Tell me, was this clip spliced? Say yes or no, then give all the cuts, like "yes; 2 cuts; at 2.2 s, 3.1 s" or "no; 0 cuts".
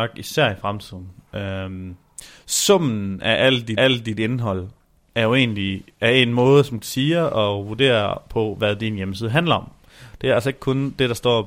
yes; 2 cuts; at 3.8 s, 6.8 s